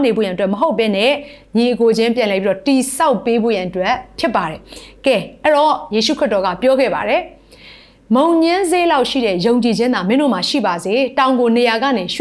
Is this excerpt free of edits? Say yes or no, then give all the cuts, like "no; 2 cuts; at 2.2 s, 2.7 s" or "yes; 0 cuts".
yes; 0 cuts